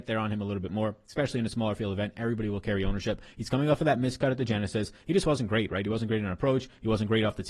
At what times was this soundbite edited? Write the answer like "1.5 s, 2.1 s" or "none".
none